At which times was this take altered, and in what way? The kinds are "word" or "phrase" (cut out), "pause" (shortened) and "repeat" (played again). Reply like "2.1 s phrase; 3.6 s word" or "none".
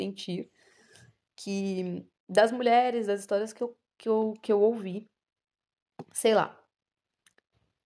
none